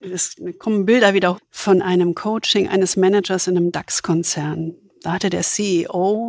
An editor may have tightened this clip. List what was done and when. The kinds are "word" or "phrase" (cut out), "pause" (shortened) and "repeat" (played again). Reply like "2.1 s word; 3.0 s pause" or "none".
1.4 s word

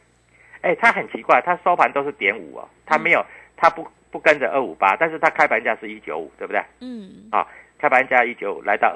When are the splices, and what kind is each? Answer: none

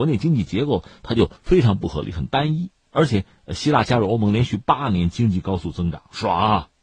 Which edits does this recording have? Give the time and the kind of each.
1.4 s pause

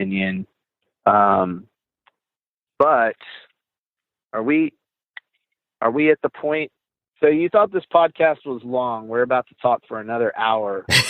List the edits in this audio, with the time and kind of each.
none

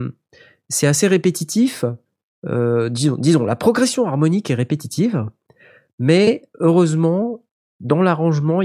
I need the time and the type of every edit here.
none

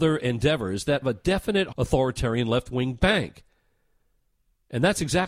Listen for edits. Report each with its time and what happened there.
1.0 s word; 1.7 s word

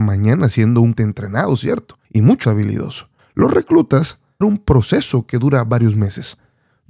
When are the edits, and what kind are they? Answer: 1.0 s word; 2.0 s pause; 2.4 s word; 3.2 s pause; 4.4 s phrase

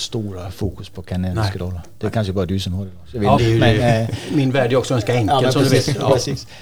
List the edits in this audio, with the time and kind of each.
3.4 s word

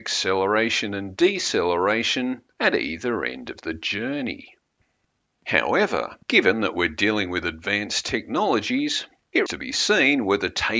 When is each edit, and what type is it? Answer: 6.2 s pause; 9.5 s word

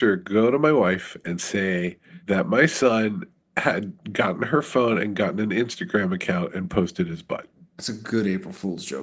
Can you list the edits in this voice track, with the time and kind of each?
none

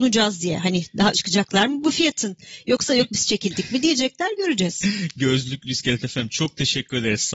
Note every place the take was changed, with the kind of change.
1.1 s word

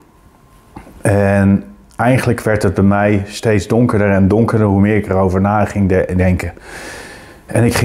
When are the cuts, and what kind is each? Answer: none

